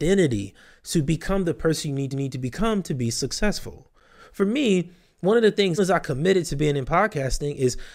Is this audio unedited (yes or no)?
no